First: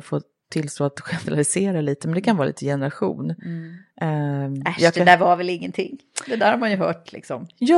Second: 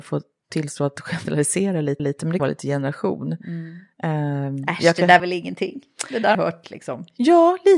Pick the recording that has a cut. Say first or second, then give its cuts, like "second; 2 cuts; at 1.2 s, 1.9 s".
second; 4 cuts; at 2.0 s, 2.4 s, 5.2 s, 6.3 s